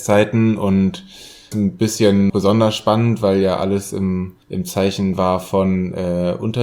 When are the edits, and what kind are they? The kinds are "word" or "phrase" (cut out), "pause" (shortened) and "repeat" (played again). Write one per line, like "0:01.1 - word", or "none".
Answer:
0:01.5 - phrase
0:02.3 - word
0:04.4 - pause